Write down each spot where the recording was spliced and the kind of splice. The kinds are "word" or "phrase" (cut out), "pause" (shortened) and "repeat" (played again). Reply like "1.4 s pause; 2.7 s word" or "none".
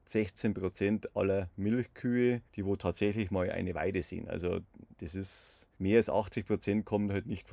2.5 s pause; 4.9 s pause; 5.7 s pause